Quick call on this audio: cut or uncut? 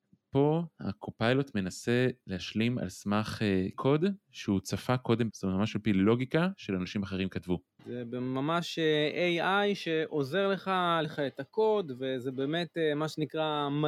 cut